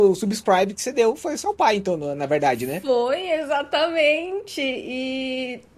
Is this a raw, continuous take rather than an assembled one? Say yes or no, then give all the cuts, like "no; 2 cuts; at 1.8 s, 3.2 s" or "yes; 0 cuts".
yes; 0 cuts